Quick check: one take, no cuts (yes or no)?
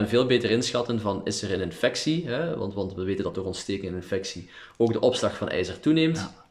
yes